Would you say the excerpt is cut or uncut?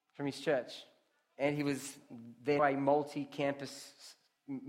cut